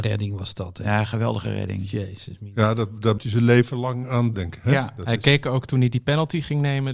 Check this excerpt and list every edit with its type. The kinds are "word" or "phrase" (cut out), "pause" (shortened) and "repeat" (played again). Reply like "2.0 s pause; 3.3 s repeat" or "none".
3.2 s word; 4.3 s word